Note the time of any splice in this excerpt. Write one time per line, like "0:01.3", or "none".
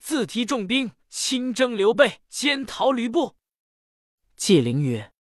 0:01.0
0:02.2